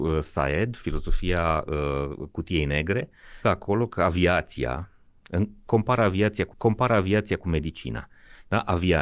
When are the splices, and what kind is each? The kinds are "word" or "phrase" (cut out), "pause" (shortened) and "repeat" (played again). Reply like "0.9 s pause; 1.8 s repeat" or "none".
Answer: 3.4 s word; 6.5 s repeat